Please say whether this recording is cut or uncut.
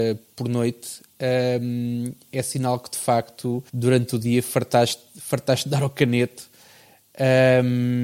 cut